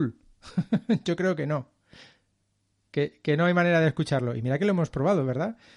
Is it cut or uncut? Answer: uncut